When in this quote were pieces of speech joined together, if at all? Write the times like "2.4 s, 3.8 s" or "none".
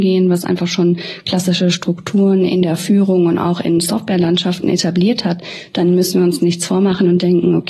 none